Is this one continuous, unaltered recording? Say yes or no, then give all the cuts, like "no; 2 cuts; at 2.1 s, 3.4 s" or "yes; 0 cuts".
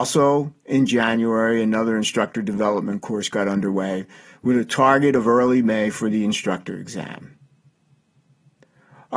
yes; 0 cuts